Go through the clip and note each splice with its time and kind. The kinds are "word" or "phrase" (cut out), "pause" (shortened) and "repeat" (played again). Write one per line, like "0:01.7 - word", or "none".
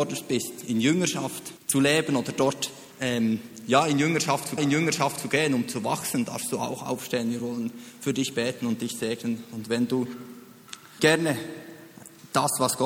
0:01.6 - pause
0:02.9 - pause
0:04.6 - repeat
0:11.0 - word